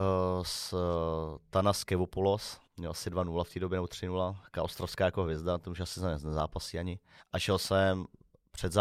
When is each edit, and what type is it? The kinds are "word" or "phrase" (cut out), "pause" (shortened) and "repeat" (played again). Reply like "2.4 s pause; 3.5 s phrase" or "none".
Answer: 2.7 s pause; 7.2 s pause